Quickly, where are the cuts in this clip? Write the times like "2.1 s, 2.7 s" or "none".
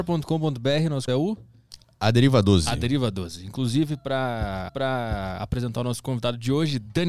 1.1 s, 4.7 s